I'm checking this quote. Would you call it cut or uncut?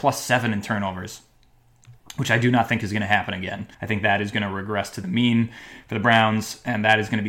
cut